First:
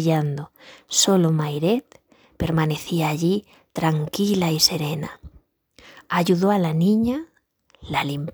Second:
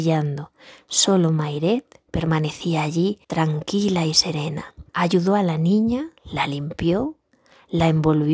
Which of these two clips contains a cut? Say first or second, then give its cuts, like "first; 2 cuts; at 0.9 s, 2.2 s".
second; 4 cuts; at 2.1 s, 3.2 s, 4.9 s, 6.2 s